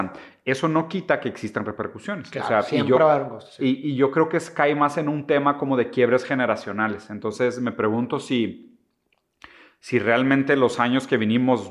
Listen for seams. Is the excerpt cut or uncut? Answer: uncut